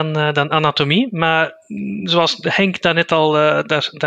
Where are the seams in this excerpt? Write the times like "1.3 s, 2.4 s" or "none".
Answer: none